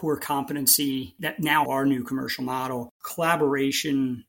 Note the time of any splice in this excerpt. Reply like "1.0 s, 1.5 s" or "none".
1.6 s, 2.9 s